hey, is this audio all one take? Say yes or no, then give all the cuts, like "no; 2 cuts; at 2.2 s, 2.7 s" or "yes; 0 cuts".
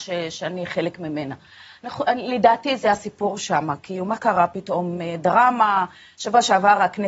yes; 0 cuts